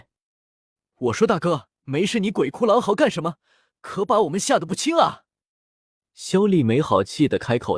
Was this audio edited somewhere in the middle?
yes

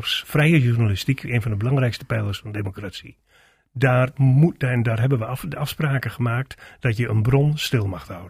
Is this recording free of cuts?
yes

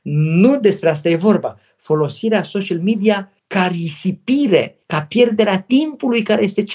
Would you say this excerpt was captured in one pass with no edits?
no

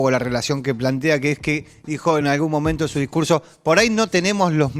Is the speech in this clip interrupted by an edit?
no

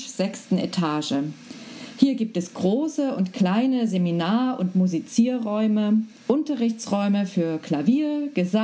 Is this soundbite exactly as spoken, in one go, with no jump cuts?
yes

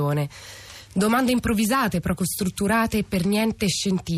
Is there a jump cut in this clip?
no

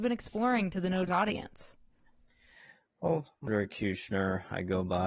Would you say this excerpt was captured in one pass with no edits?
no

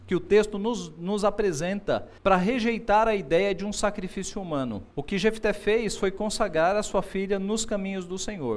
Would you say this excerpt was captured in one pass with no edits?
no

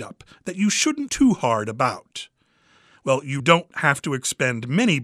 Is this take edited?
yes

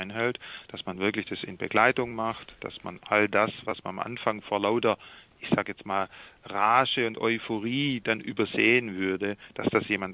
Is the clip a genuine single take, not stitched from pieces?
yes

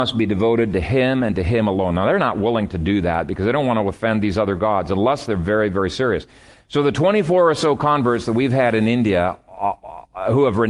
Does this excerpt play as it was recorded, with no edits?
yes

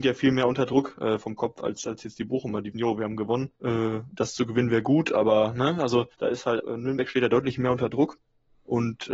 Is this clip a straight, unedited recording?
no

